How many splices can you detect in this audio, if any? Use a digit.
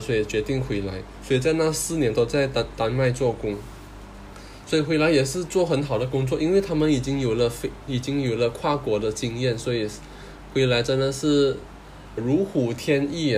1